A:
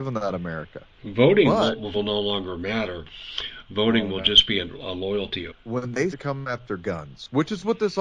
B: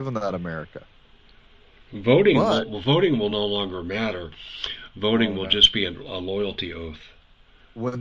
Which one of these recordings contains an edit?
A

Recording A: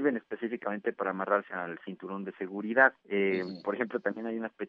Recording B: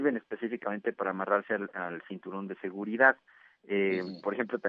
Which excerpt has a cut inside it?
A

